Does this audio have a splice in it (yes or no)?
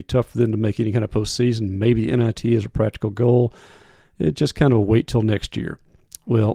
no